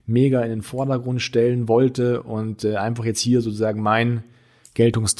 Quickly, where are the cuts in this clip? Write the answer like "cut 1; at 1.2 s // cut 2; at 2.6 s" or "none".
none